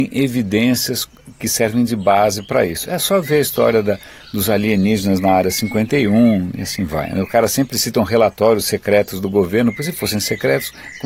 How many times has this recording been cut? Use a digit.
0